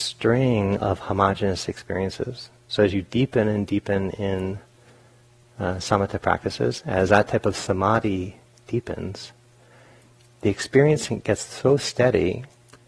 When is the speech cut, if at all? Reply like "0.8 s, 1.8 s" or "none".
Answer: none

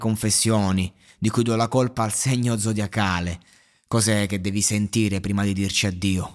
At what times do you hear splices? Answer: none

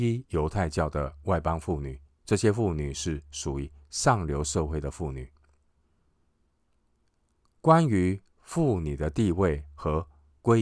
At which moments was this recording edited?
2.1 s

